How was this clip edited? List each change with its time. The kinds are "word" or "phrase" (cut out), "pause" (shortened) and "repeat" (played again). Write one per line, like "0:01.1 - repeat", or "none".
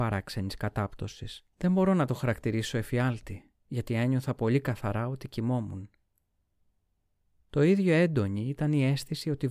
0:01.5 - pause
0:03.6 - pause